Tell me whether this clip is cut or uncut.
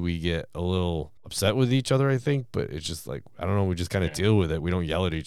cut